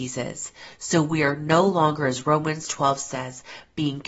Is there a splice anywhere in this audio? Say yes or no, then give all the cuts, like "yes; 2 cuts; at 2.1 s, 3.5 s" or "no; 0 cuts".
no; 0 cuts